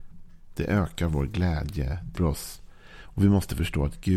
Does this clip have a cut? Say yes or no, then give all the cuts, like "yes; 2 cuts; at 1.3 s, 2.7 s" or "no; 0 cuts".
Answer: yes; 1 cut; at 2.2 s